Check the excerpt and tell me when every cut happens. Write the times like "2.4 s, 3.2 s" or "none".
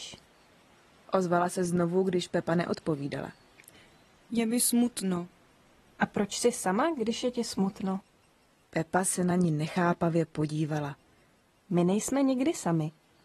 none